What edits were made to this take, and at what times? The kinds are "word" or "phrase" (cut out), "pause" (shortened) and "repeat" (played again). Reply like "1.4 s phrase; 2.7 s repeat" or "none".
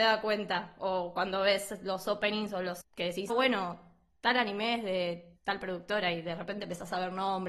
2.8 s word; 3.3 s word; 5.4 s pause